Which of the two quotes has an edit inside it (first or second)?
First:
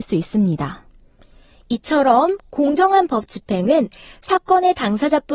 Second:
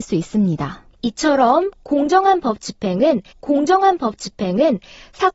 second